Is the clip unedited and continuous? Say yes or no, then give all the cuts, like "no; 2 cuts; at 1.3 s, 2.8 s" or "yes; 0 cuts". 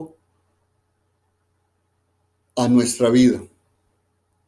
yes; 0 cuts